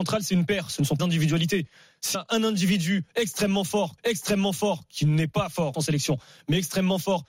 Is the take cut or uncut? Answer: cut